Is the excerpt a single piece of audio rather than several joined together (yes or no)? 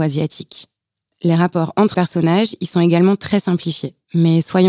no